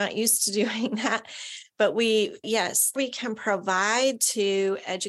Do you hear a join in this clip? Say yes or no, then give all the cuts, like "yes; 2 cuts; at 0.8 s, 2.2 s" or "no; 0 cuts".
yes; 2 cuts; at 2.4 s, 3.0 s